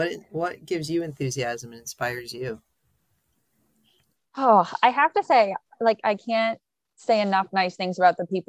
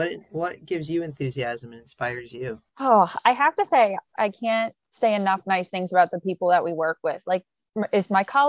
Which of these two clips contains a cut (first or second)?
second